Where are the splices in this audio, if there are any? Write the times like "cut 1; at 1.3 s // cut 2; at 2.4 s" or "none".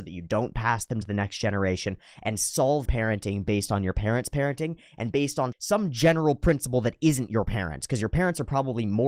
cut 1; at 1.0 s // cut 2; at 2.9 s // cut 3; at 5.5 s

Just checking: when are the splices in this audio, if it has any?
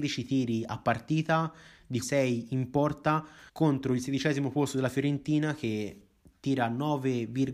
cut 1; at 2.0 s // cut 2; at 3.5 s

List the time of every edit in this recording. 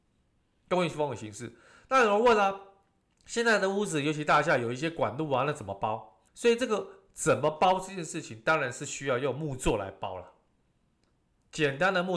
cut 1; at 6.3 s

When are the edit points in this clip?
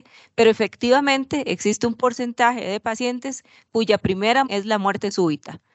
cut 1; at 4.4 s

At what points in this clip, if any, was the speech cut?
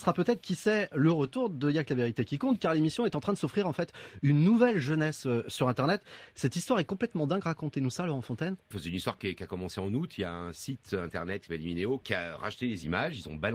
cut 1; at 8.6 s

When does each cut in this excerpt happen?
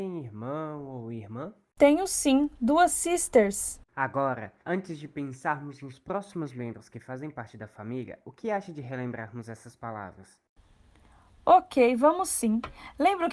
cut 1; at 4.6 s

